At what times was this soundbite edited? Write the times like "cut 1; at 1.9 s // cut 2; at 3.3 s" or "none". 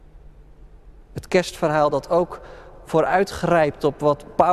none

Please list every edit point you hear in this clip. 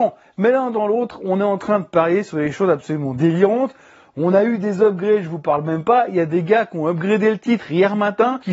none

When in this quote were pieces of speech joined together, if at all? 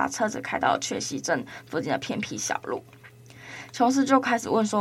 none

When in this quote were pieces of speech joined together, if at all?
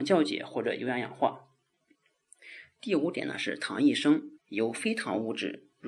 cut 1; at 4.4 s

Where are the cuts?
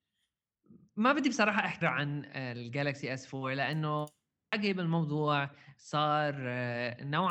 cut 1; at 1.8 s

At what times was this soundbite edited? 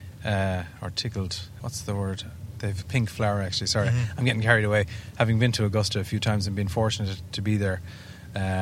cut 1; at 1.6 s // cut 2; at 2.8 s

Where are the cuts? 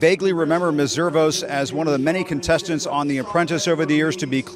none

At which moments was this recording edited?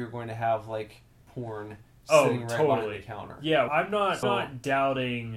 cut 1; at 1.3 s // cut 2; at 3.7 s // cut 3; at 4.2 s

